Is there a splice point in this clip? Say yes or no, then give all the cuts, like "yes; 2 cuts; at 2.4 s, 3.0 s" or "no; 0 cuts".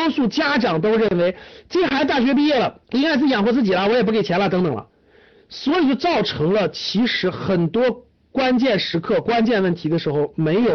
yes; 1 cut; at 2.8 s